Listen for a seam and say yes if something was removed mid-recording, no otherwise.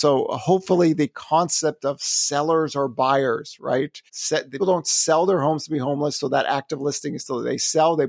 yes